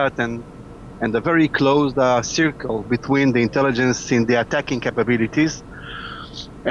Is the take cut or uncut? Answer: uncut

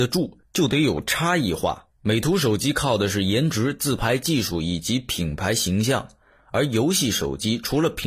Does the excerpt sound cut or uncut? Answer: uncut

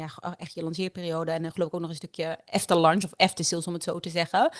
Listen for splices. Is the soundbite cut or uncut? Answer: uncut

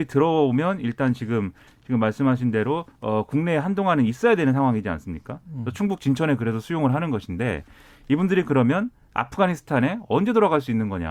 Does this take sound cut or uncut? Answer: cut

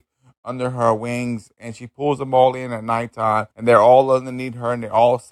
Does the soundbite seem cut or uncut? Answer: cut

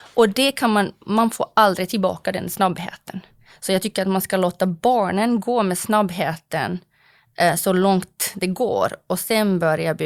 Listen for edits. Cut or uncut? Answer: uncut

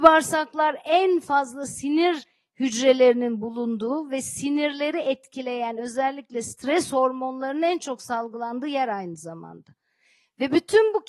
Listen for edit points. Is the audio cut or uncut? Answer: uncut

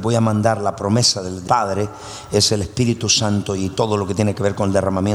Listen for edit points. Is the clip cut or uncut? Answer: uncut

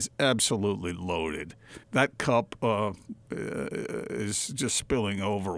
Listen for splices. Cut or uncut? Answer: cut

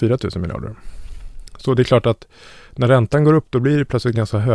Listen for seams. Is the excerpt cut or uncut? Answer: uncut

